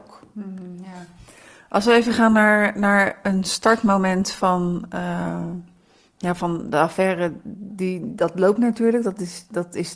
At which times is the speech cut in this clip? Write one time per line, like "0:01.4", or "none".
none